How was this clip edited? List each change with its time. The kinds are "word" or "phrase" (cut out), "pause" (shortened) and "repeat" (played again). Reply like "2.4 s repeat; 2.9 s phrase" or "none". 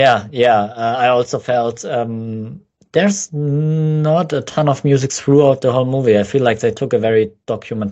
none